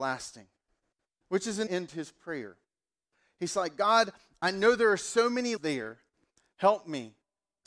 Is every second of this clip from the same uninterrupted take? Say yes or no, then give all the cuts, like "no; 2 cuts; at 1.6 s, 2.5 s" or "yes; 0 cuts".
no; 3 cuts; at 0.9 s, 1.7 s, 5.6 s